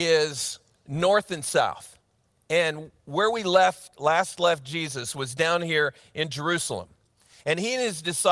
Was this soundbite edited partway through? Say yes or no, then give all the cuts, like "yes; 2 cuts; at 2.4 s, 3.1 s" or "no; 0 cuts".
no; 0 cuts